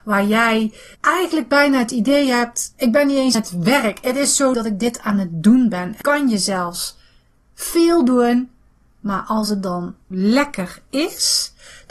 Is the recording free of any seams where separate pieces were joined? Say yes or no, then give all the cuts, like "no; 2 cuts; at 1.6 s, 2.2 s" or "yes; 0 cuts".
no; 5 cuts; at 0.9 s, 3.3 s, 4.5 s, 6.0 s, 10.1 s